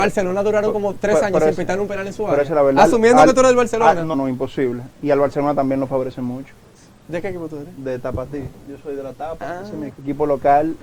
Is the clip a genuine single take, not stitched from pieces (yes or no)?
no